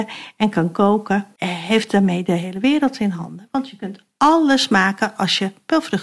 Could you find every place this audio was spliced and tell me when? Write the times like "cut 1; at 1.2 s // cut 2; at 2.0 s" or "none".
cut 1; at 1.4 s